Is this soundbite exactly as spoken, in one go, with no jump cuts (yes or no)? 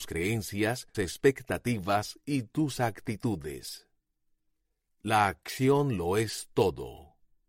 no